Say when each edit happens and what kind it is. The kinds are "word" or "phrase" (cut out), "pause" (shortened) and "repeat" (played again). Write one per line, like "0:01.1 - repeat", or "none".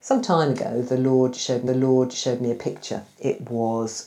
0:01.7 - repeat